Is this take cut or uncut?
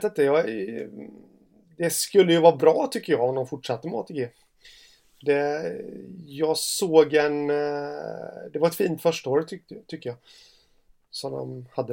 uncut